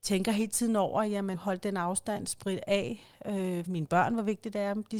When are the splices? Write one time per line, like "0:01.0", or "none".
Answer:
0:01.3
0:03.7

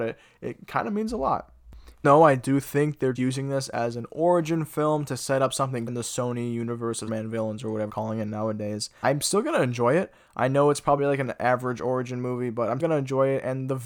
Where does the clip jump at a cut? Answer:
0:02.0
0:03.2
0:05.9
0:07.1
0:07.9
0:09.0
0:11.0
0:12.8

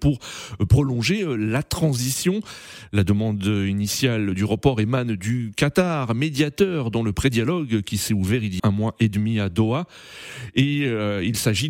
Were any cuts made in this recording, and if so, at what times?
0:08.6

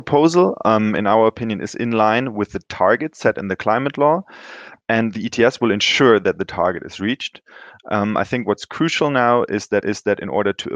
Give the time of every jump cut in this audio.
0:09.8

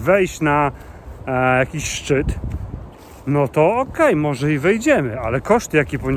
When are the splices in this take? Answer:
none

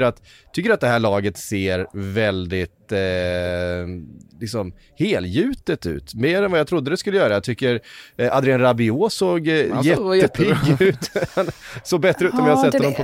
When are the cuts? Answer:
none

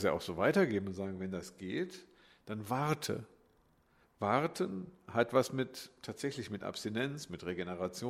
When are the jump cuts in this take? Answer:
none

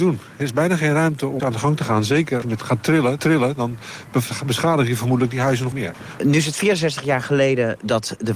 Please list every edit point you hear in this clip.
0:01.4
0:02.4
0:03.2
0:05.7

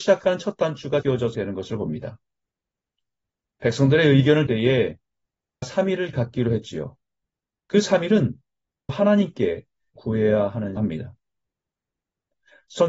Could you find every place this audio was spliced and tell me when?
0:01.0
0:01.3
0:04.5
0:05.6
0:06.1
0:08.9
0:10.0
0:10.8

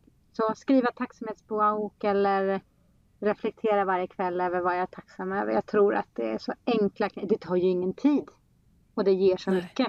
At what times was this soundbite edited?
none

